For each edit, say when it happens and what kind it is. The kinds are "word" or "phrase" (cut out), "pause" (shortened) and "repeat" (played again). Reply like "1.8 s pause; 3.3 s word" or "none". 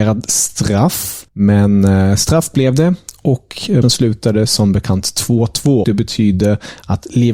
1.3 s pause; 3.8 s word; 5.8 s word

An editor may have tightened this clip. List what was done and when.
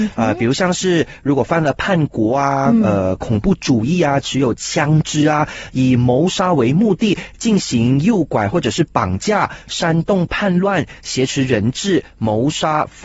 none

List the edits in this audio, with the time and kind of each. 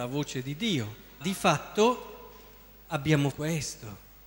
1.2 s word; 3.3 s word

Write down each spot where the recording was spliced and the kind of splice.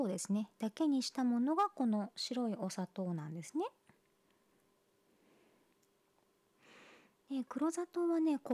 none

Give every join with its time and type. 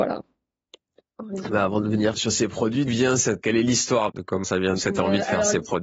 2.1 s word; 2.9 s word; 3.4 s word; 4.1 s word; 4.4 s word; 4.8 s word

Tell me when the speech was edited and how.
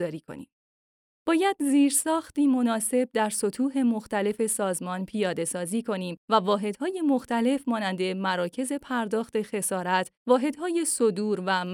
6.2 s pause; 10.2 s pause

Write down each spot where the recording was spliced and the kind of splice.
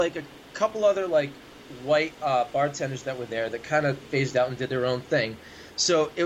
2.2 s pause; 4.1 s phrase

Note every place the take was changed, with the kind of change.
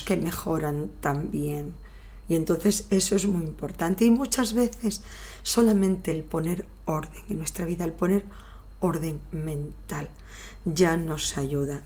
none

